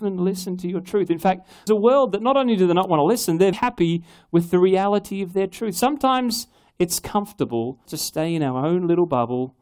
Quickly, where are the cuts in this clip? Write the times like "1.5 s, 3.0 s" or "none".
1.7 s, 3.5 s, 7.9 s